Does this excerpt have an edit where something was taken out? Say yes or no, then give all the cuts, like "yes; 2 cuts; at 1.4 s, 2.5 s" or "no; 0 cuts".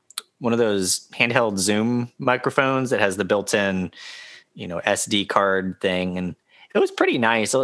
no; 0 cuts